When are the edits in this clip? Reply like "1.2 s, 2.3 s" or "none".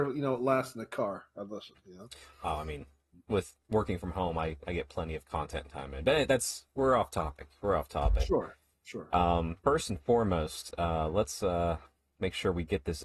9.6 s